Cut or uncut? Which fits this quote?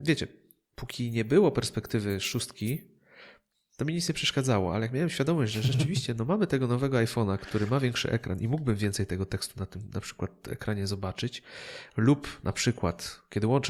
uncut